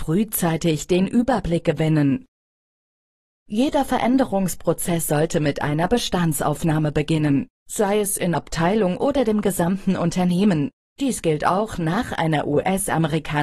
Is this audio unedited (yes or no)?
no